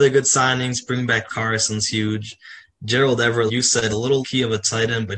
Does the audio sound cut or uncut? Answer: cut